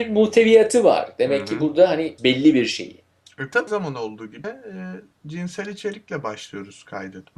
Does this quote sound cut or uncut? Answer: cut